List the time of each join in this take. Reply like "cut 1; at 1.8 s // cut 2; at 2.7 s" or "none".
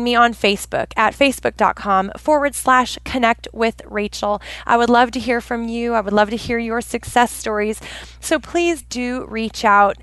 none